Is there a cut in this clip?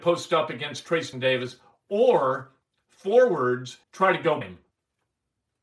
yes; 3 cuts; at 1.1 s, 3.8 s, 4.4 s

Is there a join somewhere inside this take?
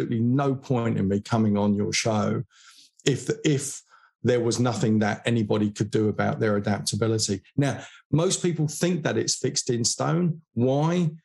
no; 0 cuts

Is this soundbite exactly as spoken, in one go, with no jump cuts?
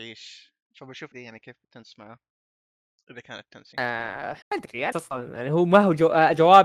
no; 6 cuts; at 1.1 s, 1.6 s, 2.6 s, 3.7 s, 4.4 s, 4.9 s

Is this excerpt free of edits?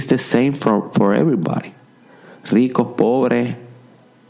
yes; 0 cuts

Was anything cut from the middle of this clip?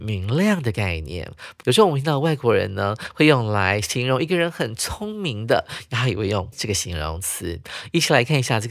yes; 1 cut; at 6.5 s

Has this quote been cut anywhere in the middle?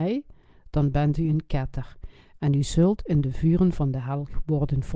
no; 0 cuts

